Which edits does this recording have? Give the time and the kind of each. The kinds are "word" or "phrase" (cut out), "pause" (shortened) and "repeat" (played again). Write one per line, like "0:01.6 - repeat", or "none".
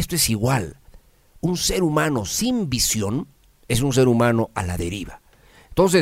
0:03.3 - pause